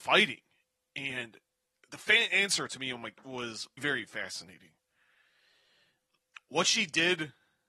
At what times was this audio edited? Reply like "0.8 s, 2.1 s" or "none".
3.8 s